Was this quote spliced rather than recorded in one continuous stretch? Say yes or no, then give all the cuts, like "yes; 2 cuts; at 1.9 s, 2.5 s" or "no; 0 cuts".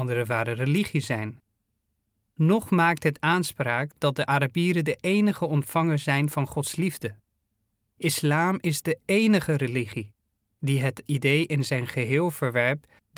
no; 0 cuts